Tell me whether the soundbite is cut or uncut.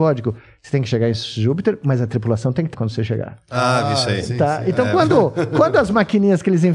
cut